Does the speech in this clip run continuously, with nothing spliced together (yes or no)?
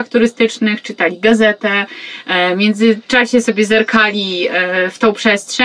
yes